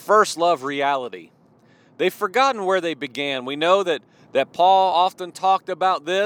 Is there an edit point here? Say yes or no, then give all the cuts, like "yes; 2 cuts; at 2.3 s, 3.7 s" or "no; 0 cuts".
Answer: no; 0 cuts